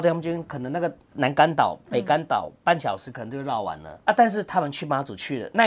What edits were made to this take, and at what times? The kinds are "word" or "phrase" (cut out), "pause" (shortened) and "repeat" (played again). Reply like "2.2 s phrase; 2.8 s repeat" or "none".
4.0 s pause